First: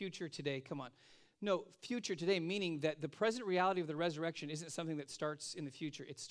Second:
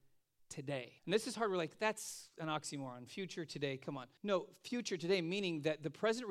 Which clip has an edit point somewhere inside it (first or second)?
second